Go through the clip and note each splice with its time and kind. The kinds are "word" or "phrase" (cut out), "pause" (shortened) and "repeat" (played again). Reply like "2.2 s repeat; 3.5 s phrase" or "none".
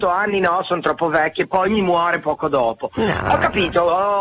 none